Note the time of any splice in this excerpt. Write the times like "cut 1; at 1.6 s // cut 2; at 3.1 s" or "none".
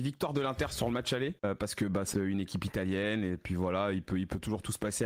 cut 1; at 1.4 s // cut 2; at 2.1 s